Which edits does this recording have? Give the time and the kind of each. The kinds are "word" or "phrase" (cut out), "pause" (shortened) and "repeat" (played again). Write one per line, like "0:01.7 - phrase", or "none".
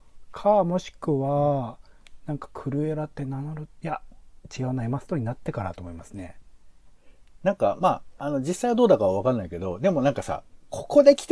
none